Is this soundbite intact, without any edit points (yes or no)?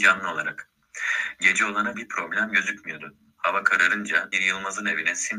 no